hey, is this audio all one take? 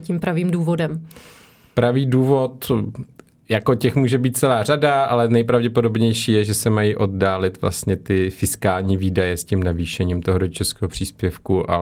yes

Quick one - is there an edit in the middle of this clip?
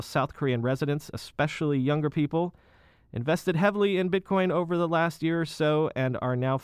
no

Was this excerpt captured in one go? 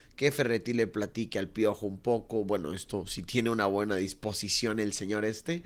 yes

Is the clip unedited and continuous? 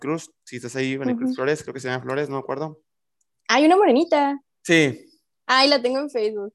yes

